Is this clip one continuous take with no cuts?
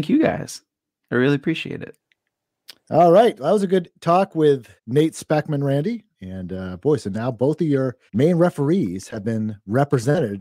no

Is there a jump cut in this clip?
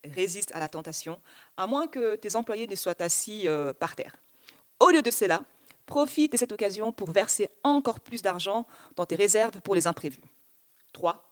no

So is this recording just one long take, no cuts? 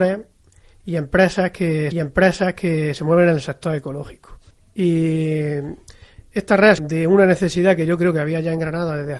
no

